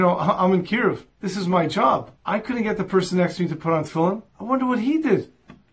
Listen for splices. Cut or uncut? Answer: cut